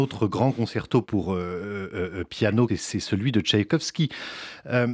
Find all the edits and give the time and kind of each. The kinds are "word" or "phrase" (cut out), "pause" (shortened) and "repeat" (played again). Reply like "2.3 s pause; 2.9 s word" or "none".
1.0 s word; 2.7 s phrase